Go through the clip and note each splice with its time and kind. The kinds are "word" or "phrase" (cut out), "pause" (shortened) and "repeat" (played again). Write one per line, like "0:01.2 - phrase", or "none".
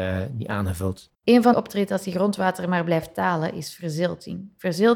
0:01.1 - pause
0:01.5 - phrase